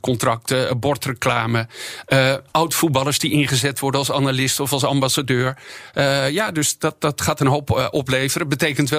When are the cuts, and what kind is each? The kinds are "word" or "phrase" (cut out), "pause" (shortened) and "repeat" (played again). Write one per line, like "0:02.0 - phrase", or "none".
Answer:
0:02.5 - pause